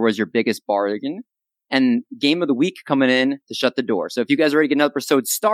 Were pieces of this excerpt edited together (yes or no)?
no